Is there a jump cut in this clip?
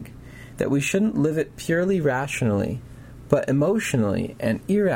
no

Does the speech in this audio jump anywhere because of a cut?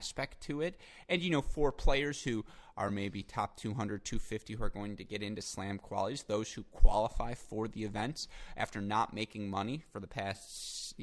no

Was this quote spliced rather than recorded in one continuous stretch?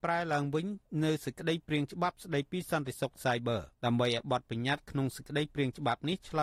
yes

